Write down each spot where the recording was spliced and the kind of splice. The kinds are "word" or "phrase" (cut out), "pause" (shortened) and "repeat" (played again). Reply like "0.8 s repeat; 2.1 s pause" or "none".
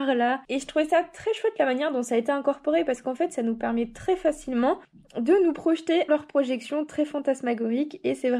6.1 s phrase